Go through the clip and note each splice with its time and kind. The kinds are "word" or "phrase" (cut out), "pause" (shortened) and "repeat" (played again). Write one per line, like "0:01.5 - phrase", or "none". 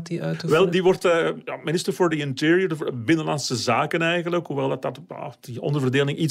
none